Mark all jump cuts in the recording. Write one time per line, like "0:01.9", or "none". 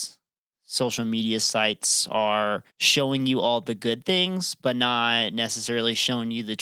0:02.7